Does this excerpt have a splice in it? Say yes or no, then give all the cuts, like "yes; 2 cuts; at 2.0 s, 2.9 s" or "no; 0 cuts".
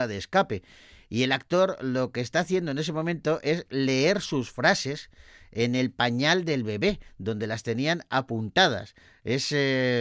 no; 0 cuts